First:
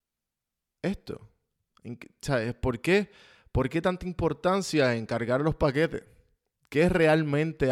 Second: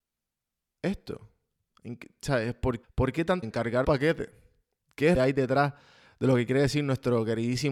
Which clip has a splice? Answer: second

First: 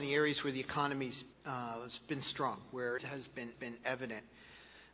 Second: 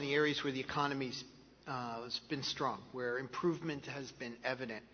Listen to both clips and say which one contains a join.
first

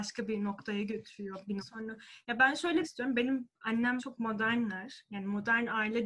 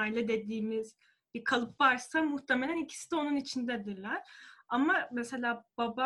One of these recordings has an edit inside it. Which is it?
first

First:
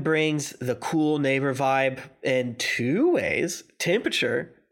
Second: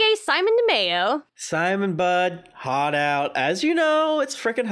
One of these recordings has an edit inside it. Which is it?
second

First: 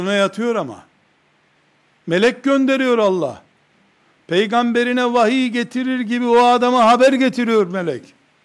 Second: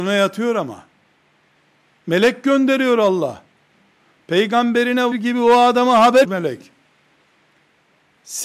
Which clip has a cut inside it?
second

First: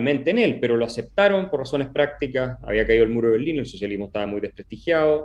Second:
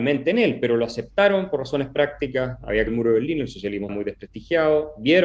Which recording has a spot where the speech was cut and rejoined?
second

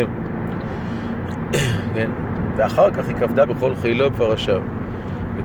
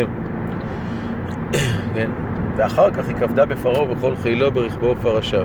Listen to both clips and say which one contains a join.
first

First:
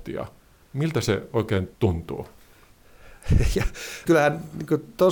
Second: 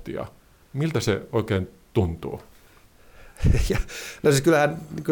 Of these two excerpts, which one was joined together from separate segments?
first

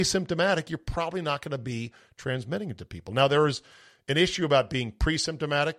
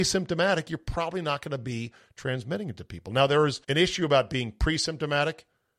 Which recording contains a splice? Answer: second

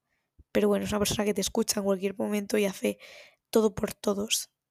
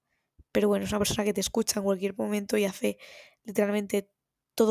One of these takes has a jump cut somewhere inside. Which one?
first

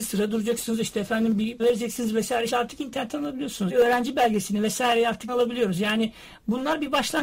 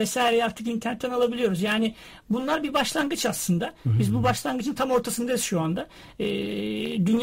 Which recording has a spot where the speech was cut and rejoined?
first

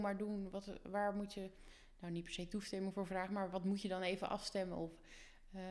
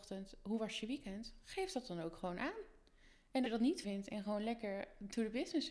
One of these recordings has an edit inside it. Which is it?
second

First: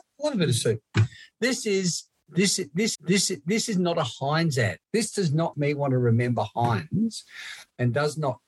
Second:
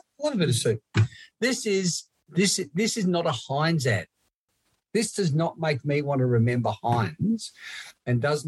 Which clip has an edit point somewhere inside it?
first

